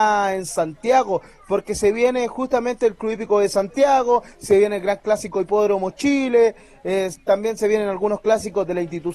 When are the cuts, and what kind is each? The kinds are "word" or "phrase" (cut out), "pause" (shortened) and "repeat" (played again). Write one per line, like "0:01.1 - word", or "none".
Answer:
none